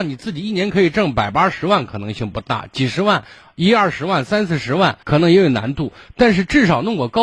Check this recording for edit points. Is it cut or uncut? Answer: cut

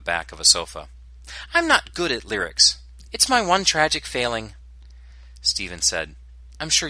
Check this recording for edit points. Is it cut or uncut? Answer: uncut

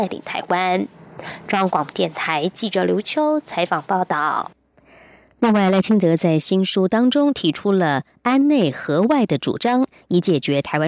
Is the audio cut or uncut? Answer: uncut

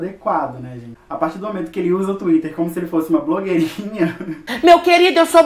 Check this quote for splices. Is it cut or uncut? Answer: uncut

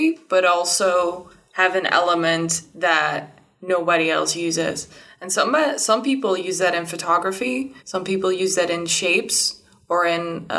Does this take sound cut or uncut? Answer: cut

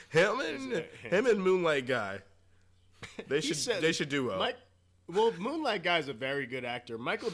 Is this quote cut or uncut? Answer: uncut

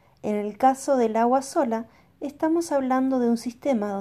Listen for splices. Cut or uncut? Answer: uncut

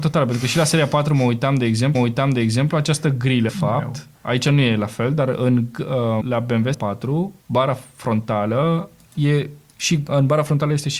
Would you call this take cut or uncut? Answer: cut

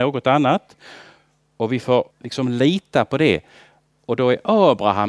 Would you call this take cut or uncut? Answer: cut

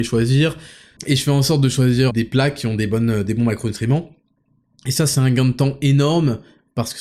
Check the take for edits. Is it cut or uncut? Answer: cut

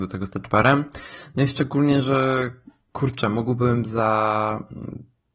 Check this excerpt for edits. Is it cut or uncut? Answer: uncut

